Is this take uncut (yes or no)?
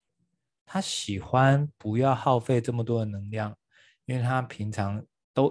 yes